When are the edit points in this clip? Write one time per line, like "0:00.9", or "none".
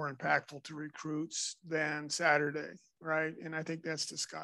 none